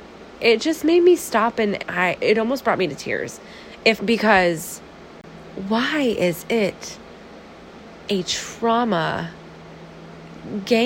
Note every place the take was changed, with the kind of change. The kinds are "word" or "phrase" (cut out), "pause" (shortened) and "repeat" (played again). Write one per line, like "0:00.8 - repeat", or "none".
0:01.8 - phrase
0:02.2 - word
0:04.0 - phrase